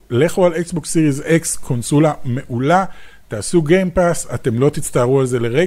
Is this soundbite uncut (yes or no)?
yes